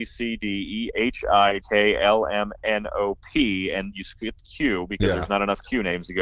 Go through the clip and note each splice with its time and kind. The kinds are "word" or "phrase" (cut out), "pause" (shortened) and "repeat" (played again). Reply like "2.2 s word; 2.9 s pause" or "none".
0.9 s phrase; 1.6 s word; 3.9 s word